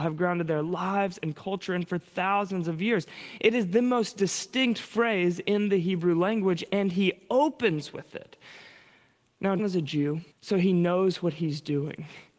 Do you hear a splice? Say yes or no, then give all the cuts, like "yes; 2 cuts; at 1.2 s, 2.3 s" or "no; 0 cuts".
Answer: yes; 2 cuts; at 9.6 s, 10.3 s